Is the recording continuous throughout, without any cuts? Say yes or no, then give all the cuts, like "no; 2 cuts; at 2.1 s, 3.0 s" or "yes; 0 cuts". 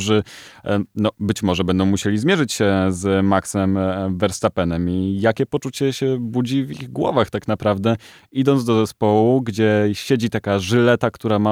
yes; 0 cuts